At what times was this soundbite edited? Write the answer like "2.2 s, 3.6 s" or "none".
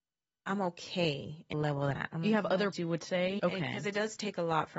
1.5 s, 2.0 s, 2.7 s, 3.4 s